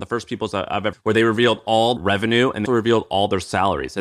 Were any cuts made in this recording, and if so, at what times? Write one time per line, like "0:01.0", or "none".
0:00.9
0:02.0
0:02.6